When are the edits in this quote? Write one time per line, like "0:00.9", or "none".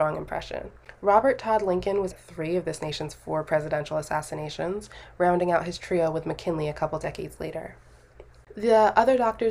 0:02.1